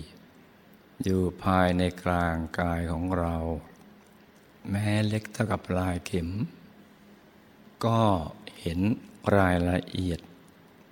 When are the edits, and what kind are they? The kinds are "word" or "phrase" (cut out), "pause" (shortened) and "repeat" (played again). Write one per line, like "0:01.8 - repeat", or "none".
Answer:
0:04.2 - pause
0:07.7 - pause